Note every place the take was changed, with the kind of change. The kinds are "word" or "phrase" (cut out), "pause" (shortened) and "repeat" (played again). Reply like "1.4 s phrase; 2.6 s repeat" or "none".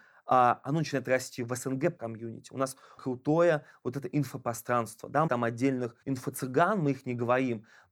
2.0 s word; 3.0 s word; 5.3 s word; 6.0 s pause